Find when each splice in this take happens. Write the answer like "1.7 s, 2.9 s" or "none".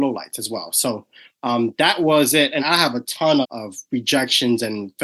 2.6 s, 3.4 s